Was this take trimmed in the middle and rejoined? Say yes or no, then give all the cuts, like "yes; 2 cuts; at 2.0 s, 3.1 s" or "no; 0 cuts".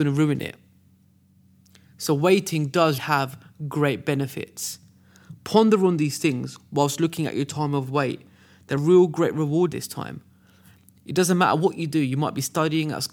yes; 3 cuts; at 3.0 s, 8.8 s, 9.7 s